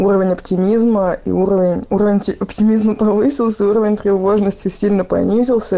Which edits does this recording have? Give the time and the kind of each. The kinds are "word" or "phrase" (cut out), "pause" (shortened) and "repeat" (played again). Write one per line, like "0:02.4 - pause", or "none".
none